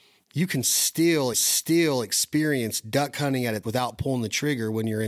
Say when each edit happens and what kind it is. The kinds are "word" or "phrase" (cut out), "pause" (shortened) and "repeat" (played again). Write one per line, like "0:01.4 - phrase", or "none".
0:01.3 - repeat
0:03.6 - word